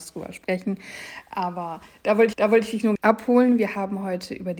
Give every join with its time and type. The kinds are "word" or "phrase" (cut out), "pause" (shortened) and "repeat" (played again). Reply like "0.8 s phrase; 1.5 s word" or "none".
2.3 s repeat; 3.0 s phrase